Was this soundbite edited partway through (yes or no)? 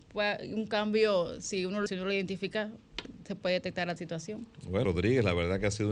yes